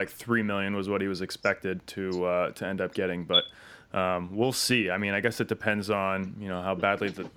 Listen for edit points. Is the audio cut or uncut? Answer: uncut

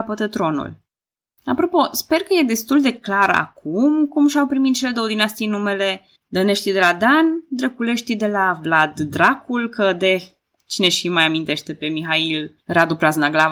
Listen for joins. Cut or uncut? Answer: cut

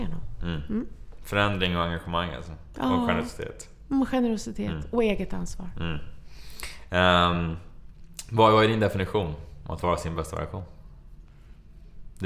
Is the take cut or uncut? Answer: uncut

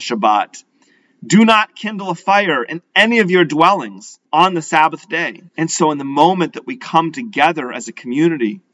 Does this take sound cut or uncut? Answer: cut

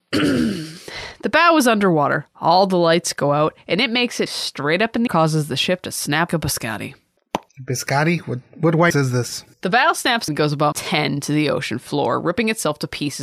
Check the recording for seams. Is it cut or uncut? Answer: cut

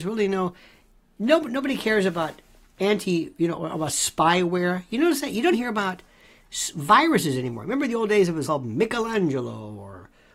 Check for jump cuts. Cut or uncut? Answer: cut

